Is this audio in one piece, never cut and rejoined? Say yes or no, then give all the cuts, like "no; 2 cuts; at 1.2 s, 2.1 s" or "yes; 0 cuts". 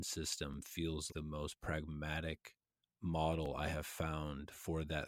no; 2 cuts; at 1.1 s, 2.8 s